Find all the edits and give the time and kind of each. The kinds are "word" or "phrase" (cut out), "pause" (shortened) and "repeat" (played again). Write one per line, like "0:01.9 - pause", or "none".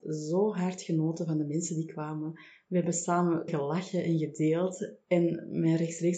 0:03.5 - word